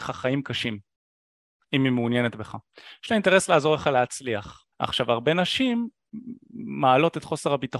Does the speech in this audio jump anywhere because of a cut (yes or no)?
yes